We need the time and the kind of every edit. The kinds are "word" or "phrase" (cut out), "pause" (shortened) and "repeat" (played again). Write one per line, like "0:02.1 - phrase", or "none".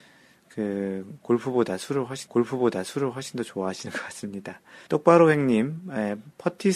0:02.3 - repeat
0:04.9 - pause